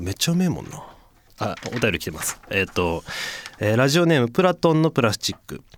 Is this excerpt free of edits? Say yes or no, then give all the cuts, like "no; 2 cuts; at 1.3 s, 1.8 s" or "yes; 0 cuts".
yes; 0 cuts